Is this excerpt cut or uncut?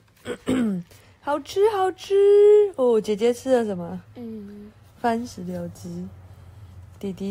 cut